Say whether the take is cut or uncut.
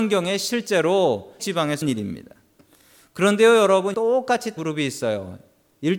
cut